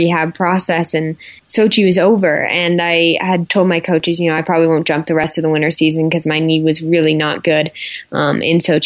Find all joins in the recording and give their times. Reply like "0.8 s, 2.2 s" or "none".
1.4 s